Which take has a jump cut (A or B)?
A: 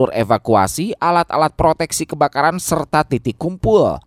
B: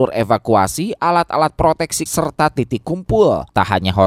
B